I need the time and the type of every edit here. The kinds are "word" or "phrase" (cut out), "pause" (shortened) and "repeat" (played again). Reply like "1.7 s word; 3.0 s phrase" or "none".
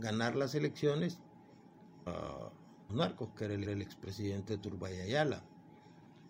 2.1 s word; 2.9 s phrase; 3.7 s repeat